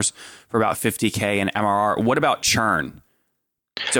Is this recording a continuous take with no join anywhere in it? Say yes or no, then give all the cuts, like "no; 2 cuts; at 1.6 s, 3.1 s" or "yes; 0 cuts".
yes; 0 cuts